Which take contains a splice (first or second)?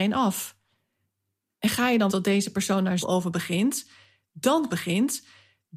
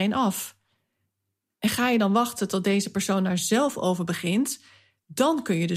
first